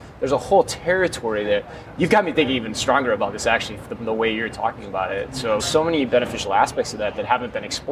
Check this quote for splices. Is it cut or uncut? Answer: cut